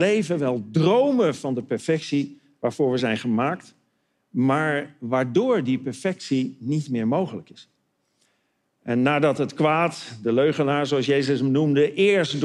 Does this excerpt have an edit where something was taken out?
no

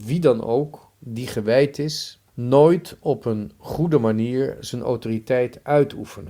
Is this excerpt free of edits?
no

